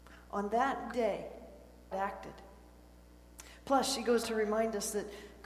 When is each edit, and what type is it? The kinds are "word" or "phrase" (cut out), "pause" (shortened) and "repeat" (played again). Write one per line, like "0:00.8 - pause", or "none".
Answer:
0:00.9 - word
0:01.9 - word
0:04.2 - word